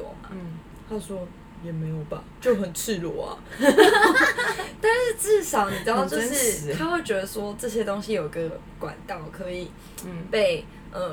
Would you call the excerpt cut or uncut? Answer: cut